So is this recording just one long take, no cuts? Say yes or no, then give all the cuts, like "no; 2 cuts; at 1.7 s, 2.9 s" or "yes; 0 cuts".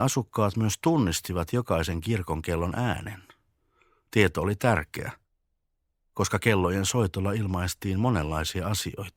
yes; 0 cuts